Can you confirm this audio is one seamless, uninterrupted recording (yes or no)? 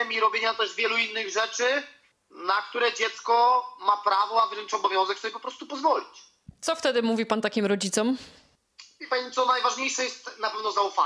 no